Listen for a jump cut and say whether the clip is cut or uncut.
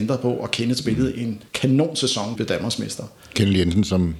cut